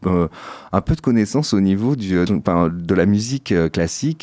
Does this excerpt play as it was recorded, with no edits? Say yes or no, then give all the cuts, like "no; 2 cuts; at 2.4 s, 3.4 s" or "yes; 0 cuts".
no; 1 cut; at 2.3 s